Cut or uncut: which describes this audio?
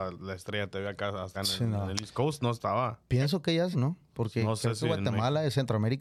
cut